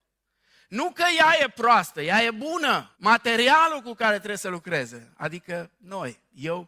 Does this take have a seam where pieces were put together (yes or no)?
yes